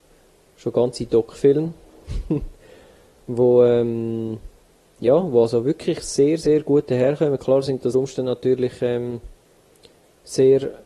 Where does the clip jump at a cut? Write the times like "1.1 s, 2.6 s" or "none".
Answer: 4.6 s, 7.9 s